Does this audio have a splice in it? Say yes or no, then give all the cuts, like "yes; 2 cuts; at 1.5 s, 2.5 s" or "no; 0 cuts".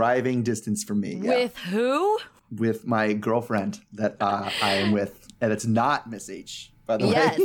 no; 0 cuts